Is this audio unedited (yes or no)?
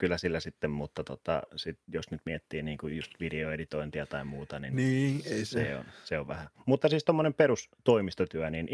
no